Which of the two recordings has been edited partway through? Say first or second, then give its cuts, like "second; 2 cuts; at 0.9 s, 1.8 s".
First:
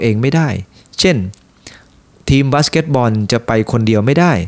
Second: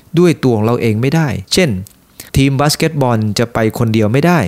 second; 2 cuts; at 1.5 s, 2.3 s